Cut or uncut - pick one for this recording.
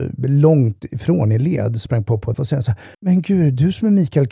cut